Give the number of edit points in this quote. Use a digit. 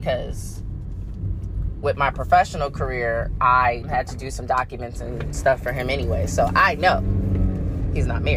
1